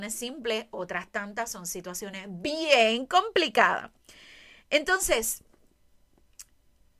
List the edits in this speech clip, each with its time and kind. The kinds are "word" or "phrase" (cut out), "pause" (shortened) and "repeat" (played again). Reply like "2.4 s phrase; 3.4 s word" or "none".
none